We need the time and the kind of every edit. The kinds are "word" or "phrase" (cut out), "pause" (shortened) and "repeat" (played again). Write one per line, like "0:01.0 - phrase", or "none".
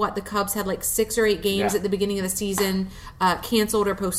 none